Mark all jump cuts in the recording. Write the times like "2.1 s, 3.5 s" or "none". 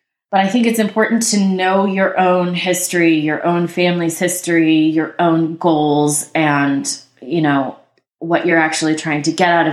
none